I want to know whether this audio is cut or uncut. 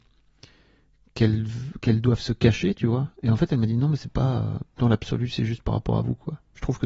uncut